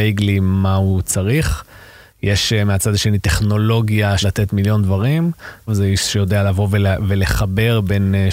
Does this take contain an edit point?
yes; 2 cuts; at 4.2 s, 5.7 s

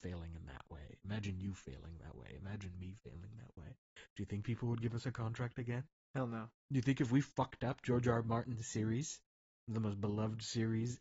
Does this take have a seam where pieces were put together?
yes; 1 cut; at 6.6 s

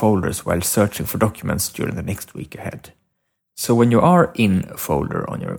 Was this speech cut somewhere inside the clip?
no; 0 cuts

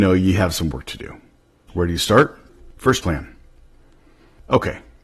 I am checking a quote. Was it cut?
yes; 2 cuts; at 1.4 s, 3.0 s

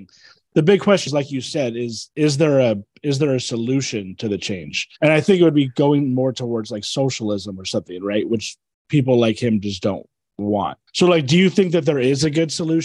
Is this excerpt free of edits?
no; 4 cuts; at 1.1 s, 2.1 s, 4.9 s, 10.9 s

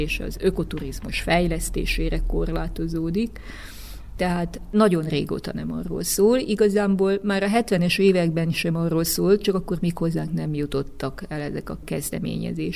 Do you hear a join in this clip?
no; 0 cuts

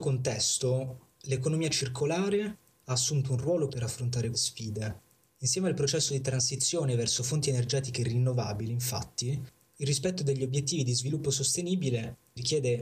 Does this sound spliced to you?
yes; 2 cuts; at 3.7 s, 4.3 s

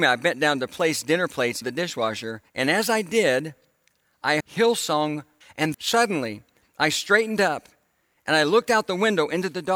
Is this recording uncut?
no; 5 cuts; at 1.6 s, 2.5 s, 4.4 s, 5.4 s, 5.7 s

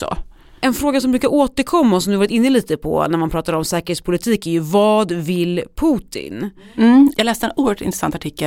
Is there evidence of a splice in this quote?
no; 0 cuts

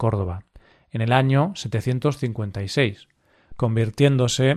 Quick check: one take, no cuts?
yes; 0 cuts

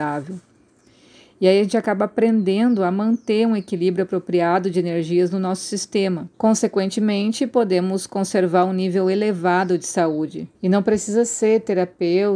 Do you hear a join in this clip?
yes; 2 cuts; at 6.3 s, 10.5 s

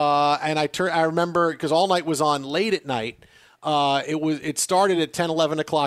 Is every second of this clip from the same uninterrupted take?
yes; 0 cuts

